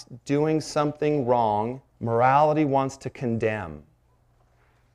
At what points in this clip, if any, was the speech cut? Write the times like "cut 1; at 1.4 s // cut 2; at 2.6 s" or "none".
cut 1; at 1.9 s